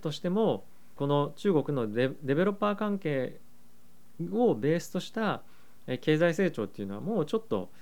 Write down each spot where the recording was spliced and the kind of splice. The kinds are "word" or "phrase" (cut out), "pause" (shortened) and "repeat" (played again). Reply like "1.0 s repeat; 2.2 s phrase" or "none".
1.0 s phrase